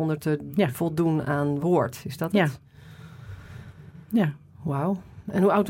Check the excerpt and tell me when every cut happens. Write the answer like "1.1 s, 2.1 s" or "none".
1.6 s